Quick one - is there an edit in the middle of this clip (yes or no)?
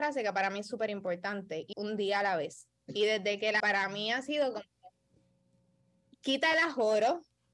yes